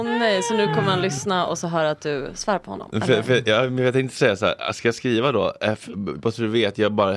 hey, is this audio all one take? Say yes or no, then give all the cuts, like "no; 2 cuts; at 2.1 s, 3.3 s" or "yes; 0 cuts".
yes; 0 cuts